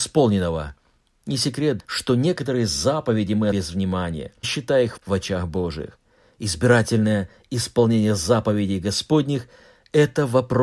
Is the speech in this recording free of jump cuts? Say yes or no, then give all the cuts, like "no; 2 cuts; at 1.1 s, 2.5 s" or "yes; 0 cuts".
no; 4 cuts; at 1.8 s, 3.5 s, 4.4 s, 5.0 s